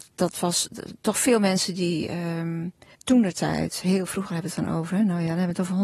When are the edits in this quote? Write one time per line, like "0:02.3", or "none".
0:02.9